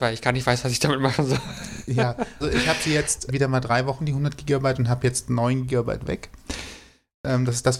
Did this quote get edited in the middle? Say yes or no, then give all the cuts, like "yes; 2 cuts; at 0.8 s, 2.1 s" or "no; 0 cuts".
yes; 3 cuts; at 2.4 s, 3.3 s, 4.0 s